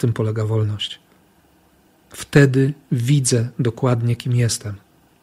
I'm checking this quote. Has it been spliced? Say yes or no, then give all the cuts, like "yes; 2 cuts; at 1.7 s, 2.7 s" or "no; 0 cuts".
no; 0 cuts